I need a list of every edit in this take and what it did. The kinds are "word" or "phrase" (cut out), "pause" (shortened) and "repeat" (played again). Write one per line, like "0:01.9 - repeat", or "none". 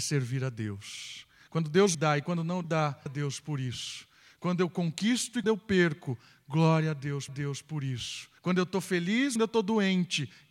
0:01.9 - word
0:02.6 - phrase
0:03.1 - word
0:05.4 - word
0:07.3 - repeat
0:08.4 - pause
0:09.4 - phrase

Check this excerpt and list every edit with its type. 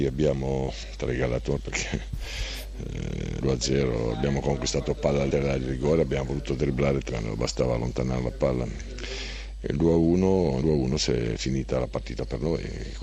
0:01.1 - word
0:01.6 - word
0:03.4 - word
0:05.3 - word
0:07.1 - word
0:10.6 - word

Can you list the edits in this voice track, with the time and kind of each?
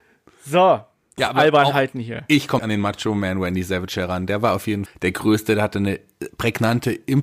0:01.2 - word
0:02.6 - word
0:04.9 - word

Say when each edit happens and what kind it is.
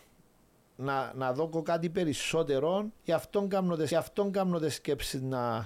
0:03.0 - pause
0:03.9 - repeat

